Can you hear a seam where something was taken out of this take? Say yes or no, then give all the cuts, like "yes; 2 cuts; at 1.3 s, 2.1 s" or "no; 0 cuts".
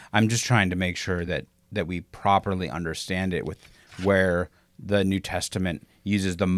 no; 0 cuts